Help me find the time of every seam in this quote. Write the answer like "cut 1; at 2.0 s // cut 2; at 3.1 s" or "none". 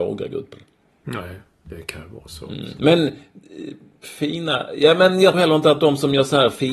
cut 1; at 5.3 s

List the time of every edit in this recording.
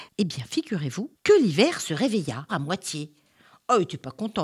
cut 1; at 1.1 s // cut 2; at 2.5 s

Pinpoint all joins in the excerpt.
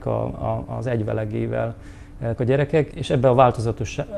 cut 1; at 2.4 s // cut 2; at 2.9 s

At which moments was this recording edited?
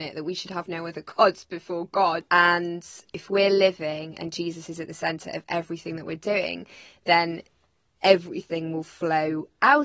none

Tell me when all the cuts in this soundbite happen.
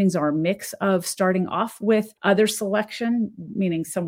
cut 1; at 2.2 s

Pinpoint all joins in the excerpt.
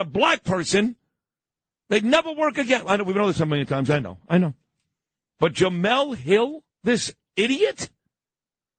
cut 1; at 6.7 s

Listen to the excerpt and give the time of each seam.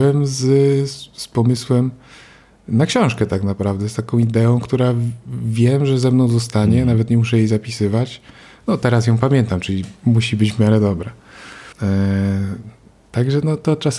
cut 1; at 10.0 s // cut 2; at 11.7 s

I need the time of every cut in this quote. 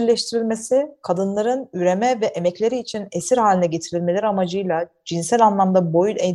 none

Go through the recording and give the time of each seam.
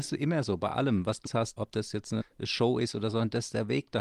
cut 1; at 1.3 s // cut 2; at 1.6 s // cut 3; at 2.2 s

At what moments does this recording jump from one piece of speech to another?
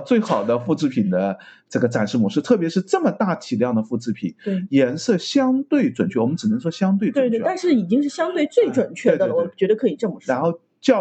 none

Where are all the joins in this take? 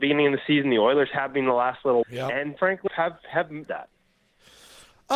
cut 1; at 2.0 s // cut 2; at 2.6 s // cut 3; at 2.9 s // cut 4; at 3.7 s

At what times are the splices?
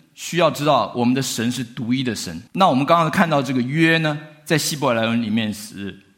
cut 1; at 2.5 s

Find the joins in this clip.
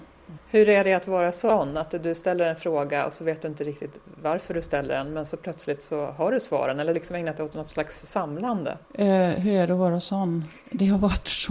cut 1; at 6.9 s // cut 2; at 8.8 s

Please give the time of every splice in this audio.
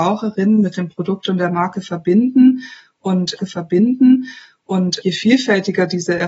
cut 1; at 3.4 s

